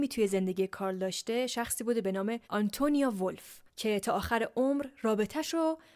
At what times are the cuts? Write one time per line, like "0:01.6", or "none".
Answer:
0:02.4
0:03.7